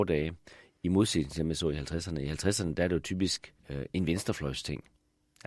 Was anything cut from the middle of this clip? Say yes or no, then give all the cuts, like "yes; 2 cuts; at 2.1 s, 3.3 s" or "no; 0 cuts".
yes; 1 cut; at 3.6 s